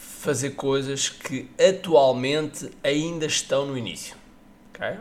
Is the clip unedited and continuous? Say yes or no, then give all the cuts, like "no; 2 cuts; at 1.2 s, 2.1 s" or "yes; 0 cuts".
yes; 0 cuts